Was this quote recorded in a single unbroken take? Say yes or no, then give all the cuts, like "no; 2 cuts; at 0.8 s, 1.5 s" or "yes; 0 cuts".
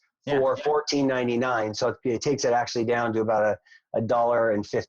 yes; 0 cuts